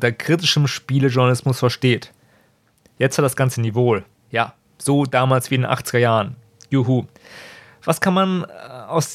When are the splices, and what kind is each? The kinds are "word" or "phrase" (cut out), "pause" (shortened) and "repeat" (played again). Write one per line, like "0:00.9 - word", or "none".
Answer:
none